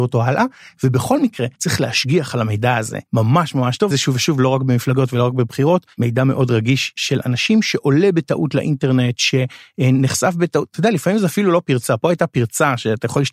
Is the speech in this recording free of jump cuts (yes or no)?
no